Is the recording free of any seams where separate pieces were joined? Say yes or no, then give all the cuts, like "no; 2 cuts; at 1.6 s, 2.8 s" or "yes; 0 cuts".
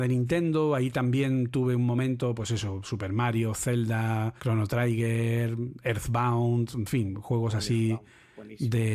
no; 1 cut; at 4.4 s